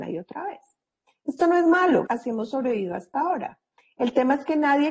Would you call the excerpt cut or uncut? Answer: cut